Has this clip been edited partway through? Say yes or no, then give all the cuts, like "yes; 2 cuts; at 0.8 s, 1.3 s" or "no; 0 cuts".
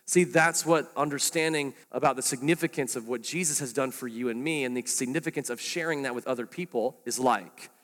yes; 1 cut; at 1.8 s